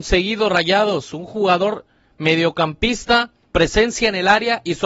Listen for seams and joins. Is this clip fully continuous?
no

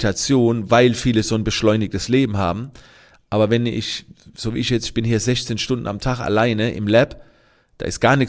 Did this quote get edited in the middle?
no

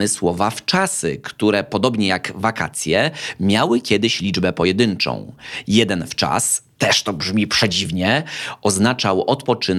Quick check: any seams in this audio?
no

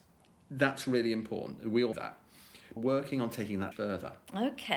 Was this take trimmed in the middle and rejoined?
yes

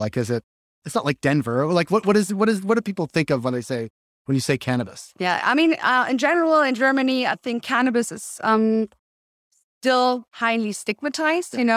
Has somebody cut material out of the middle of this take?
no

